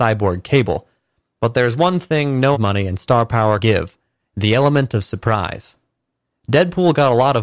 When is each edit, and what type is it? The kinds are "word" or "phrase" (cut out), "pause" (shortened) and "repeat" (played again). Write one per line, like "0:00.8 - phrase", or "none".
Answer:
0:02.5 - word
0:03.6 - word